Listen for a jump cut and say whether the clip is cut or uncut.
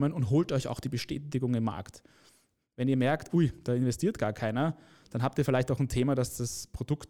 uncut